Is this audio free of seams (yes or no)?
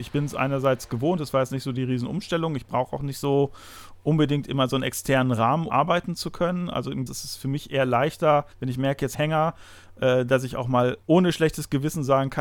no